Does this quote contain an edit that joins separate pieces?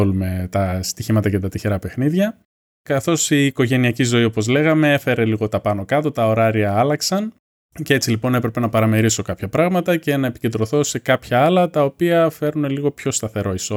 no; 0 cuts

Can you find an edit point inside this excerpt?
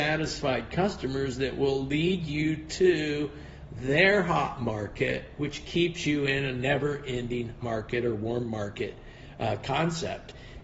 yes; 1 cut; at 7.6 s

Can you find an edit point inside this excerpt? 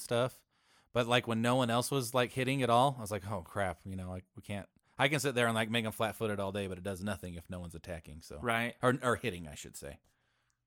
no; 0 cuts

